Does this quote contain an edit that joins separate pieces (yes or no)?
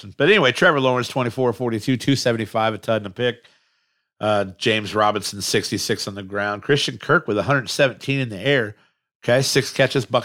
no